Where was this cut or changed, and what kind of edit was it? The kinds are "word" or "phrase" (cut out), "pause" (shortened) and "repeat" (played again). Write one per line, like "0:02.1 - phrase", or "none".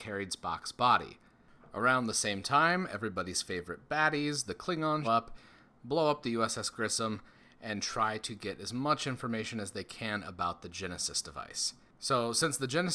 0:05.0 - word

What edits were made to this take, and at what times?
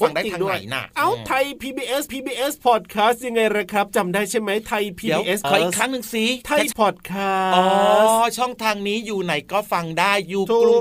0:02.1 - repeat
0:05.4 - word
0:06.7 - word

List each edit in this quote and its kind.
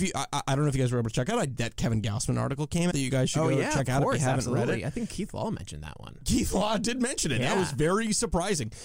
0:02.9 - word

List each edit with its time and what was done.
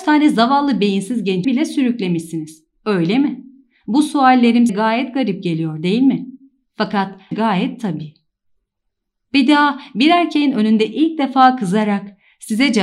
0:01.4 - word
0:04.7 - word
0:07.3 - word

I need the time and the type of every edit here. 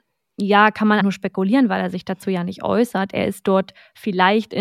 0:01.0 - word

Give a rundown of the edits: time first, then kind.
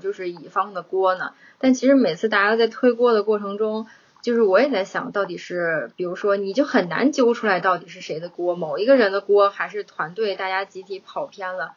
none

